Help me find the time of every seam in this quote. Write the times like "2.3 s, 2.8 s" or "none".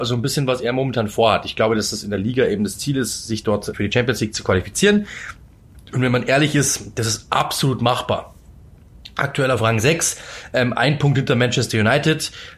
3.7 s